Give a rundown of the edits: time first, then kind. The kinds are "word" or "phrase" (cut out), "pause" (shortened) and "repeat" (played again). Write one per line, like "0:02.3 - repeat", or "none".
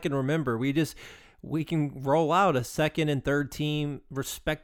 none

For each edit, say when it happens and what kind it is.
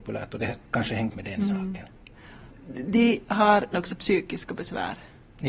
0:01.1 - word
0:03.7 - word

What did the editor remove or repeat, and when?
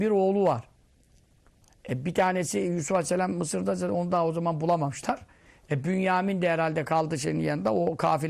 none

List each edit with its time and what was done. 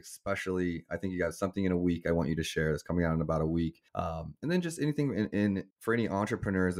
0:03.9 - pause
0:05.7 - pause

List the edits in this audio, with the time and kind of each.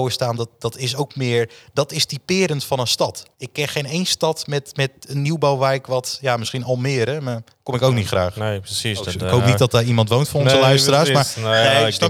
0:03.3 - pause

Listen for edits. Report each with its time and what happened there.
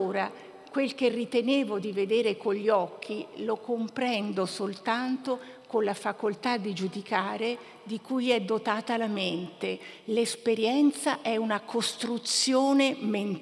none

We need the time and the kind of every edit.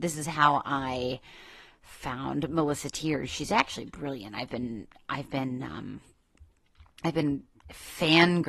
none

